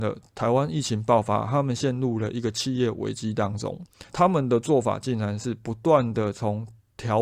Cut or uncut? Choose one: cut